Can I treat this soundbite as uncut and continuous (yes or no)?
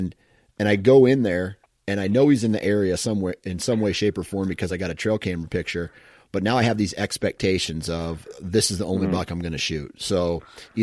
yes